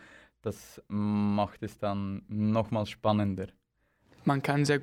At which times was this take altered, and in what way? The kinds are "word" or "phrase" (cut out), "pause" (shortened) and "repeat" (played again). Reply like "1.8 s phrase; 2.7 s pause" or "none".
none